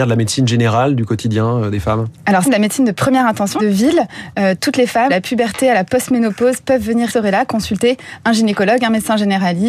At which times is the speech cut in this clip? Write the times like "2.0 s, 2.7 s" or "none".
2.4 s, 3.6 s, 5.1 s, 7.1 s

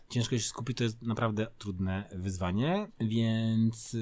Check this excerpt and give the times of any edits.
1.6 s

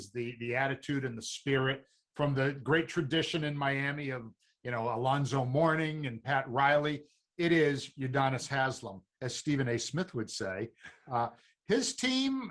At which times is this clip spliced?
9.2 s

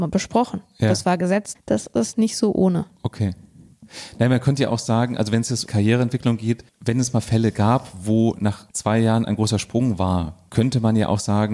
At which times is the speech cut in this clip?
1.5 s, 5.7 s, 6.7 s, 8.7 s

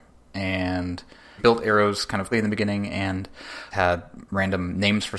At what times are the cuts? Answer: 1.4 s, 2.3 s, 3.7 s

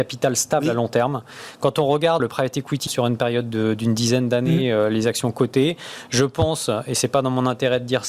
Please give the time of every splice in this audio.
2.2 s, 2.9 s

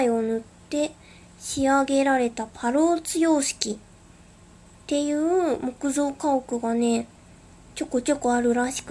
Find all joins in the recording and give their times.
none

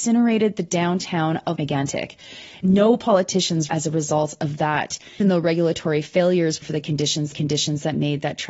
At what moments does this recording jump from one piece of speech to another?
1.6 s, 3.7 s, 5.2 s, 6.6 s, 7.3 s

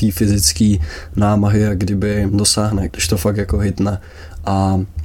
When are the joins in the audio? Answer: 2.3 s, 2.9 s

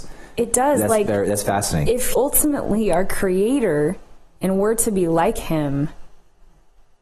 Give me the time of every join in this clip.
2.1 s

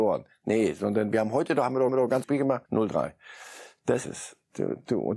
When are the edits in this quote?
1.9 s, 2.2 s, 2.7 s, 4.0 s

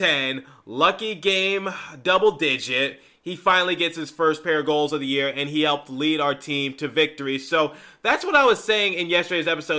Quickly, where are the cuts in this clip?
none

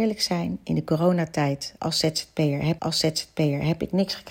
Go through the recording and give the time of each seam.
2.8 s

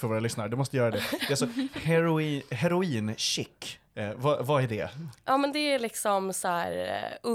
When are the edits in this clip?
none

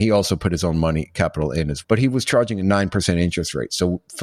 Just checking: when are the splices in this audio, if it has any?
1.8 s

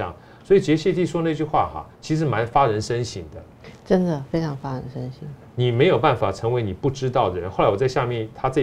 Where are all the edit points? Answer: 1.9 s

